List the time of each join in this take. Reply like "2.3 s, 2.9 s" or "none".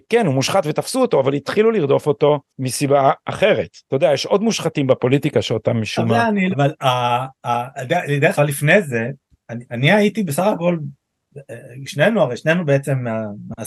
2.5 s, 3.8 s, 6.5 s, 8.4 s